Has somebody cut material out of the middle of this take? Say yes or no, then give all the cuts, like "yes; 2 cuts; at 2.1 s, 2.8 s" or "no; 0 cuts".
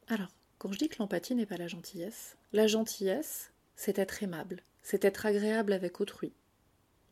yes; 3 cuts; at 2.4 s, 3.6 s, 4.7 s